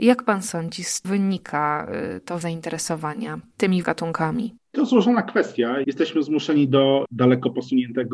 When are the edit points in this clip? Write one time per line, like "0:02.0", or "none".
0:01.0
0:02.4
0:03.8
0:04.6
0:05.8
0:07.1